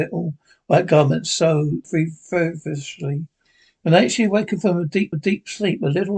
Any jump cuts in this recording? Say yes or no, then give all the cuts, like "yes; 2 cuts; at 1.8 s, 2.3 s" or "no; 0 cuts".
yes; 2 cuts; at 1.8 s, 5.1 s